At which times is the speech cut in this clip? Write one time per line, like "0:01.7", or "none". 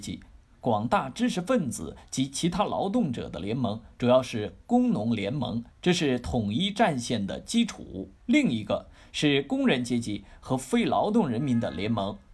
0:05.7
0:08.2